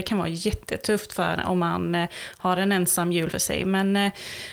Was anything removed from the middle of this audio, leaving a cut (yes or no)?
yes